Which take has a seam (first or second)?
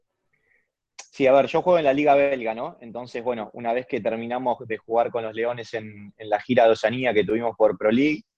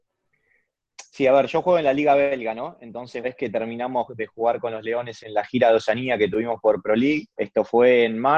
second